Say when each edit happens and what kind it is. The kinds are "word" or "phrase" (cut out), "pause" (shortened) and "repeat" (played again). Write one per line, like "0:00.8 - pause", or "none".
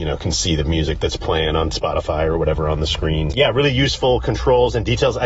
0:03.3 - word

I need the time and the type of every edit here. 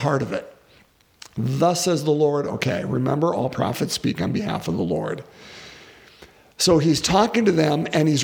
none

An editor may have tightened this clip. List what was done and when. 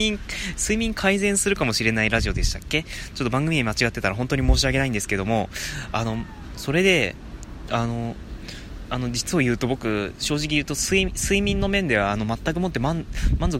0:08.9 - word

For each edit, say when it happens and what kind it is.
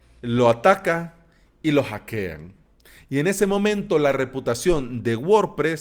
none

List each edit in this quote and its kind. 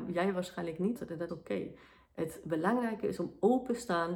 0:01.0 - phrase
0:01.3 - word

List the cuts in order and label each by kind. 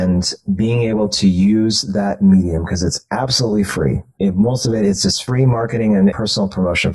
none

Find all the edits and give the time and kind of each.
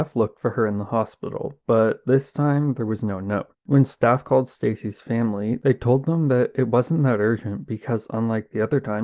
0:03.5 - pause

